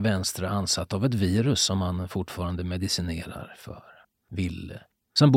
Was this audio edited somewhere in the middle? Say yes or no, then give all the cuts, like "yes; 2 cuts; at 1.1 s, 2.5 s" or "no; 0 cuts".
no; 0 cuts